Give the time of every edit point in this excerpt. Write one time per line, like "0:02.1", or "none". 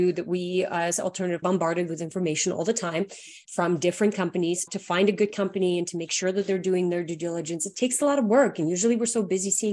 0:01.4
0:03.4
0:04.7